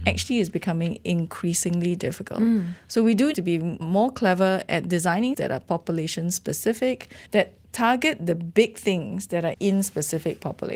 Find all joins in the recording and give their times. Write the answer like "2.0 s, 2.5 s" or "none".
3.3 s, 3.8 s, 5.3 s, 7.3 s, 9.5 s